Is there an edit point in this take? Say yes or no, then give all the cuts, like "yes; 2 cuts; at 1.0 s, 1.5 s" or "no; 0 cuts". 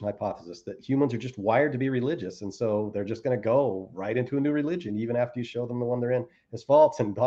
no; 0 cuts